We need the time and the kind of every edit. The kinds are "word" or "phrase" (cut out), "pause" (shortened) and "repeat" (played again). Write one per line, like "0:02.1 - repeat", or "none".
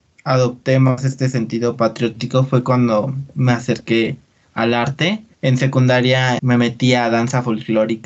0:05.3 - pause
0:06.4 - word